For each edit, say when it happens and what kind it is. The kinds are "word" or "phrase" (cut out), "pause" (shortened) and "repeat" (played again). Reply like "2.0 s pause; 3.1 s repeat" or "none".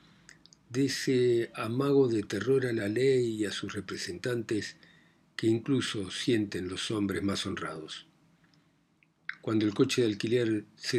none